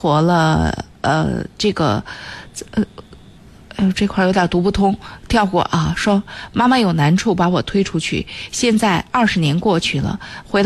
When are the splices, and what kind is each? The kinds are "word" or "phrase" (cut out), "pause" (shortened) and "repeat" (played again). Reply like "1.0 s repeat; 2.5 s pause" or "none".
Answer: 0.9 s pause